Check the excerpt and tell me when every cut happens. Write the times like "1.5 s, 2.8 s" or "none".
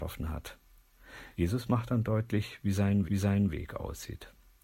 1.3 s, 3.1 s